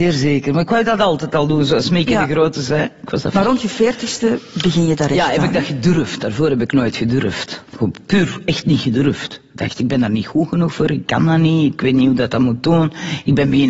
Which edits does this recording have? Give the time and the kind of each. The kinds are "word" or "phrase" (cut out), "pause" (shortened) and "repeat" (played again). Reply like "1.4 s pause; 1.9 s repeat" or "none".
none